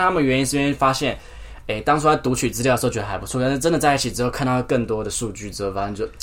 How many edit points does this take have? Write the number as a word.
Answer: zero